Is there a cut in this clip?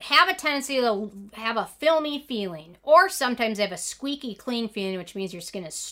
no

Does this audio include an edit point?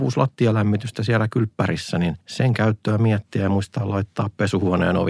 no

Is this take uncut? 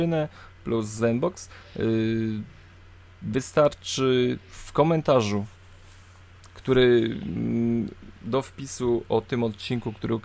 no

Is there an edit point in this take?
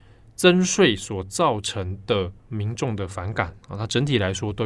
yes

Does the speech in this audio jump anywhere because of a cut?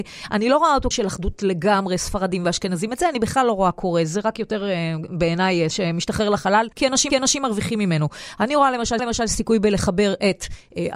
yes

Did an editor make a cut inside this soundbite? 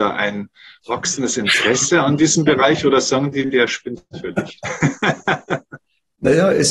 no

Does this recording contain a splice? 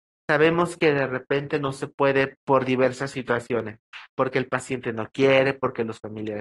no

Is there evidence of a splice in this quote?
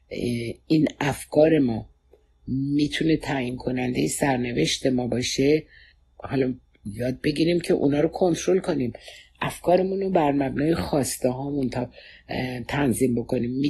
no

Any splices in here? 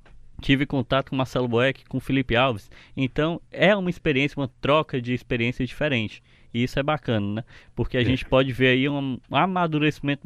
no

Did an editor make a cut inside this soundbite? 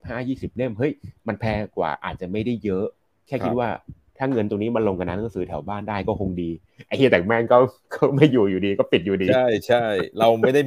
no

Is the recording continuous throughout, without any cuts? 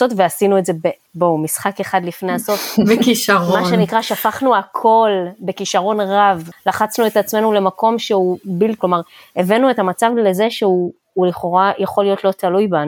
no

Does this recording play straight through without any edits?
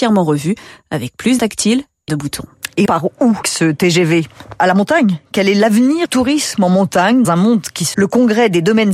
no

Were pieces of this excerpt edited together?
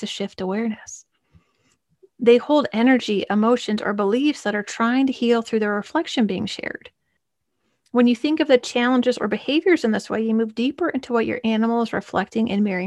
no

